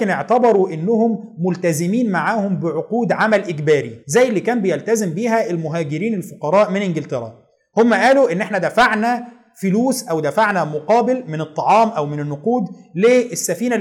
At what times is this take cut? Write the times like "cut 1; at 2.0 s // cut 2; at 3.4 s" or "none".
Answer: cut 1; at 4.0 s